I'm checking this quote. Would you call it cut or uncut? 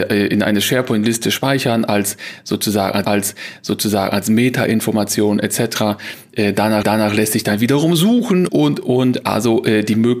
cut